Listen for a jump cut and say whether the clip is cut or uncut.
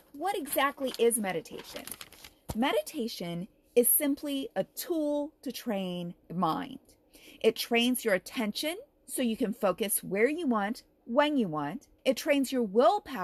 cut